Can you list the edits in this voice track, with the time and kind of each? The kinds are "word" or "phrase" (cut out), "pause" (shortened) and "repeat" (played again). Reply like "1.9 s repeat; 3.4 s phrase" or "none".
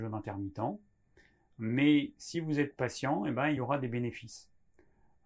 none